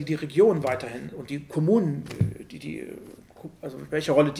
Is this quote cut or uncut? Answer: uncut